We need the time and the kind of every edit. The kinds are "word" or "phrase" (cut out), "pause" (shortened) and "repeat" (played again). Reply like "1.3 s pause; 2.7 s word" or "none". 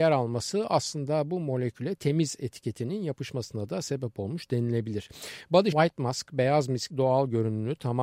5.7 s word; 6.9 s word